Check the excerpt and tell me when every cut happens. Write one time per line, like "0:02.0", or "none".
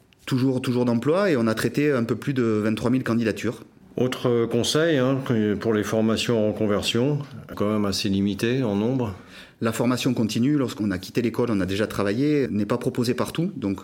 0:03.8
0:07.5
0:12.5